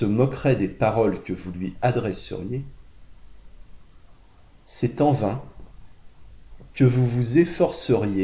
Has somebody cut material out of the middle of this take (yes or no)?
no